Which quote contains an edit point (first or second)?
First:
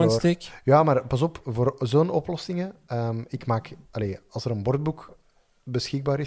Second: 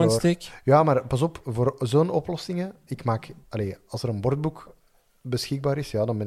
second